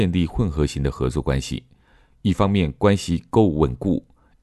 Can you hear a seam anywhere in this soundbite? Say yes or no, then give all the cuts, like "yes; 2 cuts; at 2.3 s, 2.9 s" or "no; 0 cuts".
no; 0 cuts